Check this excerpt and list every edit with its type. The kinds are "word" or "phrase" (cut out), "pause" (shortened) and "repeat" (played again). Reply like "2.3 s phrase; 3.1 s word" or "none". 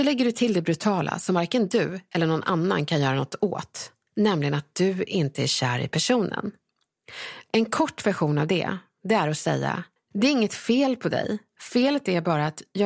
10.0 s pause